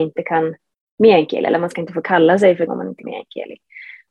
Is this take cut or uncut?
cut